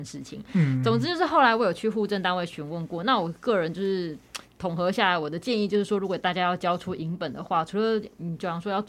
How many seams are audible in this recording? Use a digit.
0